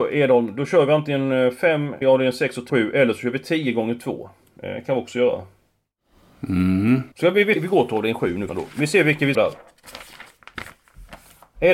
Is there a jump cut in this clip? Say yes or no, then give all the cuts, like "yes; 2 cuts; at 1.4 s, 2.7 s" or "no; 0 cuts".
yes; 6 cuts; at 2.0 s, 2.7 s, 7.1 s, 7.6 s, 8.5 s, 9.3 s